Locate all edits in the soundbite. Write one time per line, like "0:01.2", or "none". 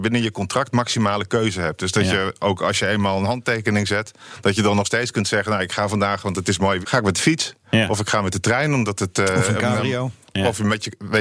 0:06.8

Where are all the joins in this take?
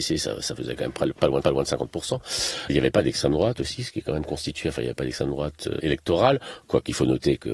0:01.4

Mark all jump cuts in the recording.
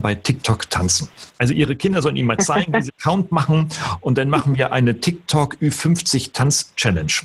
0:02.9

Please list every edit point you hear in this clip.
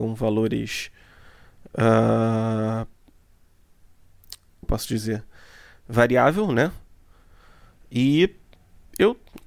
0:04.6

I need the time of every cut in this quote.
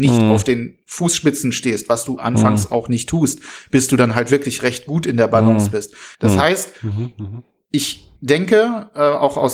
0:06.1
0:08.2

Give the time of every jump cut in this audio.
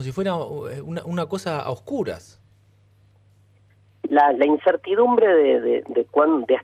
none

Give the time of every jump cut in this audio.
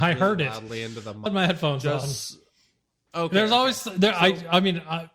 0:01.3

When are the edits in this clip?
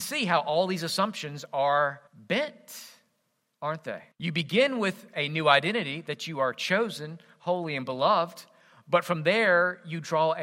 0:02.1
0:04.1

